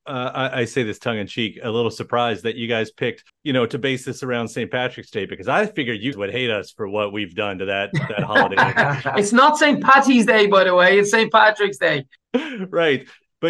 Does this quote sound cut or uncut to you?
cut